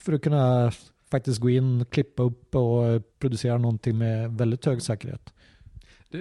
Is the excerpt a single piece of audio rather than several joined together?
no; 1 cut; at 3.1 s

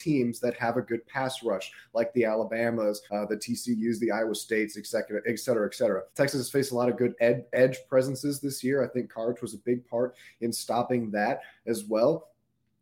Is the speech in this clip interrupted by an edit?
yes; 2 cuts; at 3.1 s, 6.1 s

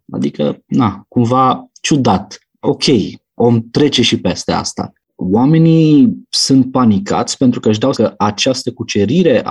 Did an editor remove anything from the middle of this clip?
yes; 1 cut; at 7.9 s

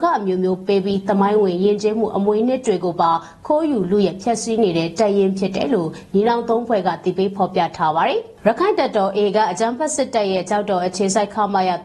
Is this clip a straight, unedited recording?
yes; 0 cuts

